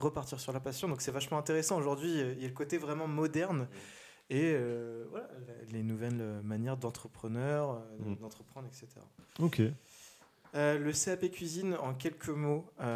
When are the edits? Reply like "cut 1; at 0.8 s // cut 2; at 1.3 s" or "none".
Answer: cut 1; at 9.3 s